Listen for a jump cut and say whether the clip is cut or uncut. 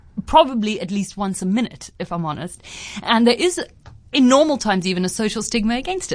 uncut